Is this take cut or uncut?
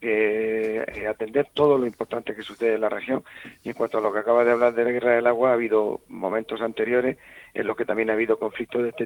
uncut